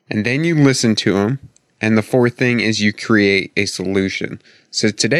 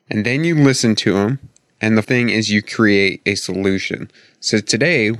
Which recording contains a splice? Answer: second; 1 cut; at 2.0 s

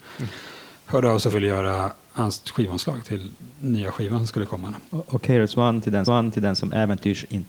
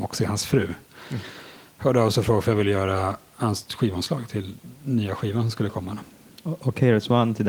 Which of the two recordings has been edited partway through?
first; 3 cuts; at 1.3 s, 4.9 s, 6.0 s

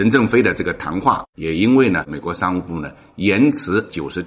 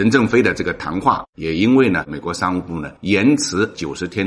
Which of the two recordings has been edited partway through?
second; 1 cut; at 3.0 s

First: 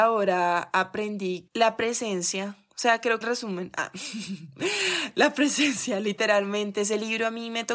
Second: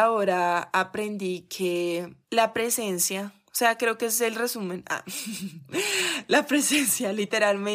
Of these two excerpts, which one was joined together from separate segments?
first; 2 cuts; at 1.5 s, 3.2 s

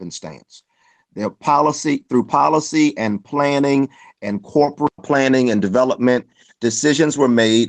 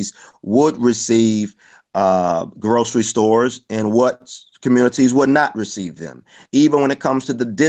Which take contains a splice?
first; 1 cut; at 5.0 s

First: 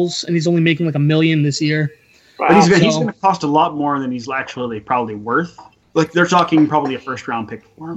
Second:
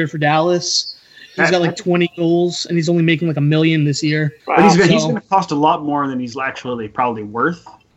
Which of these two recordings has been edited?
second; 1 cut; at 4.4 s

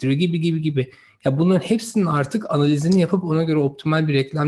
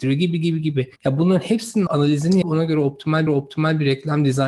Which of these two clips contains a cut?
second; 4 cuts; at 1.0 s, 1.9 s, 2.4 s, 3.3 s

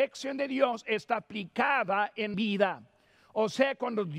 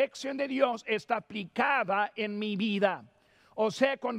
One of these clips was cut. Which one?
first; 1 cut; at 2.3 s

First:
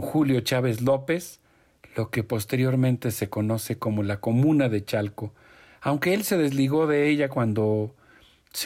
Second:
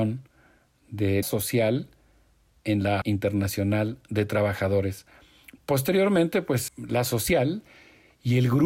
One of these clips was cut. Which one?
second; 3 cuts; at 1.2 s, 3.0 s, 6.7 s

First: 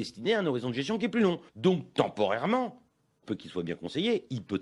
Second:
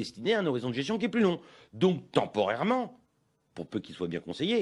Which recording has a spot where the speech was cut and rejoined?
first; 2 cuts; at 1.5 s, 3.2 s

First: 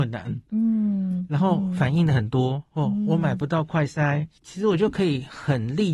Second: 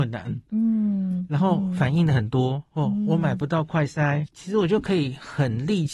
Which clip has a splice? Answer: second; 1 cut; at 4.2 s

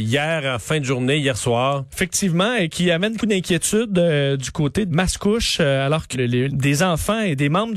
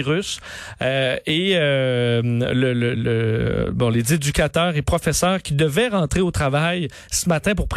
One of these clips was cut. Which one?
first; 4 cuts; at 3.2 s, 4.9 s, 6.1 s, 6.5 s

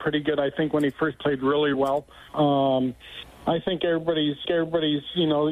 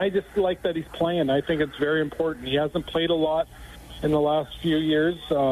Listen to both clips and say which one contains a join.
first; 4 cuts; at 1.1 s, 1.7 s, 2.3 s, 4.4 s

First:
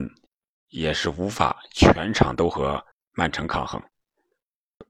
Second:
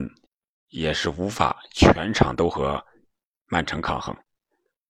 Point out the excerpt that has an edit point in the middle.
first; 1 cut; at 2.9 s

